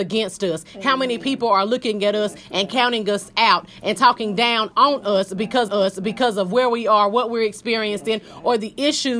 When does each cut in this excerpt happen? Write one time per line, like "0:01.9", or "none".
0:04.7
0:05.7